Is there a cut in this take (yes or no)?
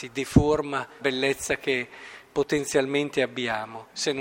yes